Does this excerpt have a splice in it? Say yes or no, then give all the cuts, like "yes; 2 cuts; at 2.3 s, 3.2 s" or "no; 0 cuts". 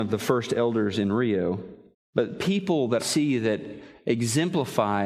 yes; 2 cuts; at 1.9 s, 3.0 s